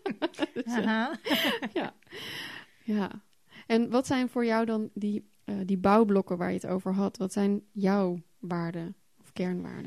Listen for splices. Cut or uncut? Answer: uncut